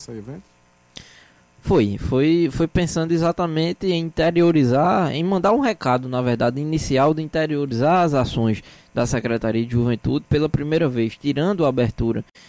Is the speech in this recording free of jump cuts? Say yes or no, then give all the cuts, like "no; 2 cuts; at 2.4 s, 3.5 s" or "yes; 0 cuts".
yes; 0 cuts